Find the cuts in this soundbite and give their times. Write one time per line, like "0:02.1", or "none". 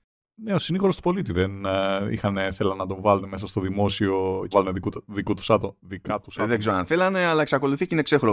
0:04.5